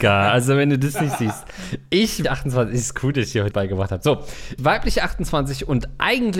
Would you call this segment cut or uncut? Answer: cut